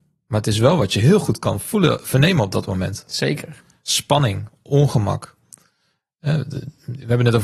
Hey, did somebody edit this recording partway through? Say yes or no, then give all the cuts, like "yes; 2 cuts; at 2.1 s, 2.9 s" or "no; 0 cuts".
no; 0 cuts